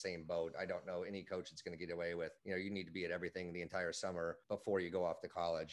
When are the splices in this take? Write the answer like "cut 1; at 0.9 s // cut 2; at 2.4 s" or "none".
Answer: cut 1; at 2.4 s // cut 2; at 4.4 s